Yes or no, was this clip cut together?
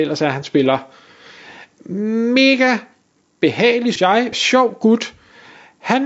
yes